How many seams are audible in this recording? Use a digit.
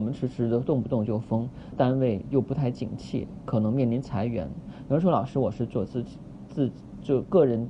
1